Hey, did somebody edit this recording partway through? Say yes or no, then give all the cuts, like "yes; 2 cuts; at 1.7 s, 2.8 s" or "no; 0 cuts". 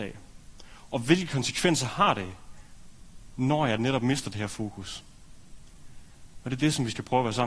no; 0 cuts